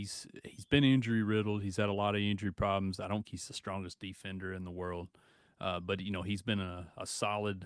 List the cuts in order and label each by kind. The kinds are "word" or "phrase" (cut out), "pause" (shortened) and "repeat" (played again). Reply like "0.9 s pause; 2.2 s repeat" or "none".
3.2 s word